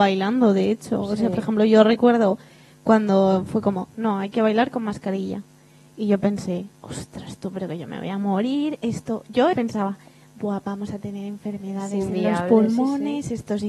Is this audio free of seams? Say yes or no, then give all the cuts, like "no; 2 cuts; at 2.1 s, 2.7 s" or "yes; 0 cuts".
no; 2 cuts; at 6.7 s, 9.5 s